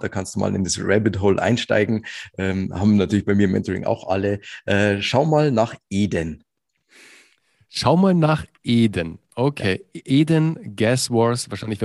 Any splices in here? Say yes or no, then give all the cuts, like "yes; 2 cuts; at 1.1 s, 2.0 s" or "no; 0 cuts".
no; 0 cuts